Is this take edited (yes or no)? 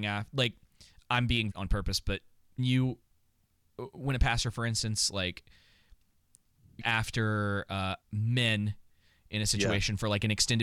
yes